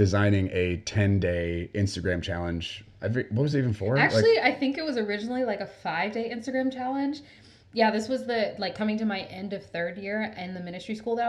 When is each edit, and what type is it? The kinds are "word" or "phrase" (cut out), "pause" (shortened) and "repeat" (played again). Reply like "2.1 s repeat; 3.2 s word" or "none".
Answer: none